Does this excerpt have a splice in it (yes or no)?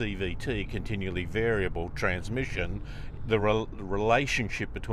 no